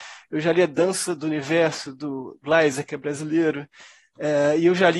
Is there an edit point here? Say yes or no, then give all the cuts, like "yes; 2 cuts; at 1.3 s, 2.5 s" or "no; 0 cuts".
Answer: no; 0 cuts